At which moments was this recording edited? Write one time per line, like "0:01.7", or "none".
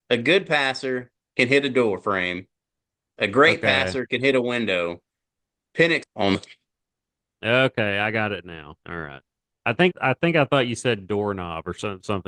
0:06.0
0:08.8
0:09.5
0:09.9